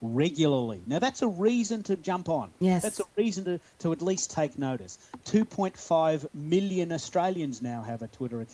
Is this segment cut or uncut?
cut